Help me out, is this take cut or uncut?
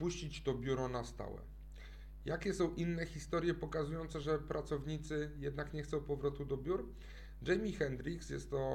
uncut